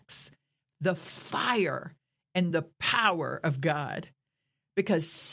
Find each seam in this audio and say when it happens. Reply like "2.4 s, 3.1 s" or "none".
none

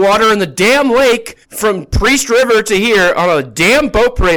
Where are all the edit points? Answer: 1.4 s

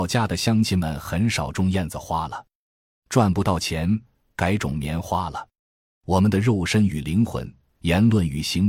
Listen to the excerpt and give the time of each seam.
none

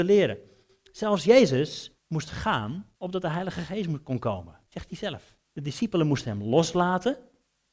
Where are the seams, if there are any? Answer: 2.0 s, 3.0 s, 4.7 s, 5.4 s

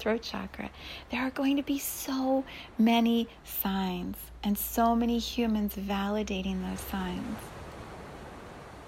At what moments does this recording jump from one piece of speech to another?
none

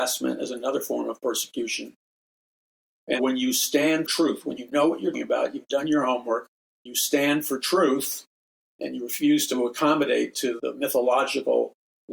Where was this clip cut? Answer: 3.2 s, 4.1 s, 5.1 s, 6.9 s, 8.8 s, 10.6 s

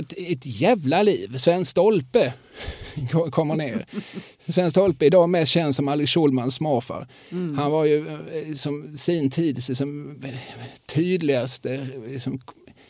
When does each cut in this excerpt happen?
none

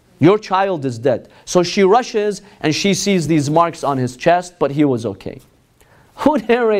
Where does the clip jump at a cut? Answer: none

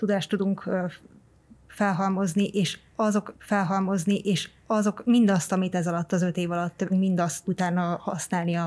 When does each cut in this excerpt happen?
3.3 s, 6.9 s, 7.4 s

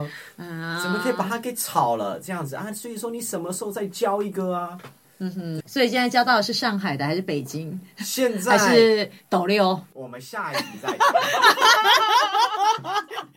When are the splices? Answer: 5.6 s

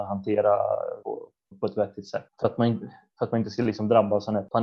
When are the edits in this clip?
1.0 s, 1.5 s

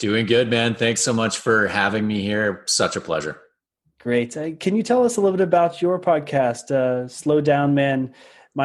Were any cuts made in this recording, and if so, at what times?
none

